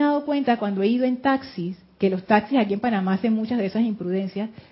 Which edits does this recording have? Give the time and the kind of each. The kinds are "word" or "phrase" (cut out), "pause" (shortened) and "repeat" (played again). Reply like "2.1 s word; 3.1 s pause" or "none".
none